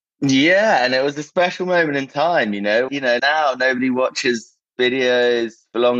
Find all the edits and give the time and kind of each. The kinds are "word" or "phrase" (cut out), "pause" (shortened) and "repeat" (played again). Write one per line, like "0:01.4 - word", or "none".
0:02.9 - word
0:03.2 - word